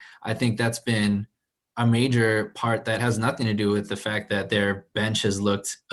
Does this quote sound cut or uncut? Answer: uncut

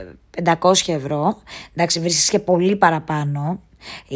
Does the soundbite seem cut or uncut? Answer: uncut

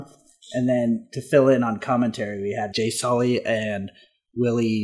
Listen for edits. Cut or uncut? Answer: cut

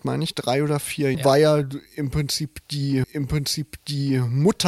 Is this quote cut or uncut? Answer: cut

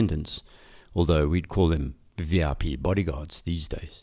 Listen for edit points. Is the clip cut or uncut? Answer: uncut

